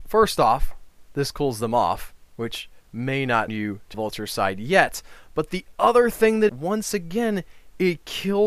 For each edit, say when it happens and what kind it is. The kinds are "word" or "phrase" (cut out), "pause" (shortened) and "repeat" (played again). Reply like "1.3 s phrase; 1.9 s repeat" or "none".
2.3 s pause; 3.5 s word; 3.9 s word; 6.5 s phrase